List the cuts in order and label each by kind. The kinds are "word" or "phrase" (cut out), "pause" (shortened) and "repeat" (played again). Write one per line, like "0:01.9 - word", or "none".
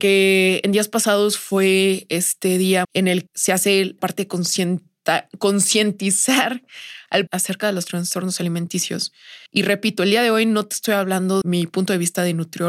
0:02.8 - word
0:03.3 - word
0:04.0 - word
0:07.3 - phrase
0:09.5 - pause
0:11.4 - word